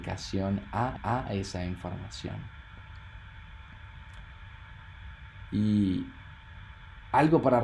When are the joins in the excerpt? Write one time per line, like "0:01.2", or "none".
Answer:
0:01.0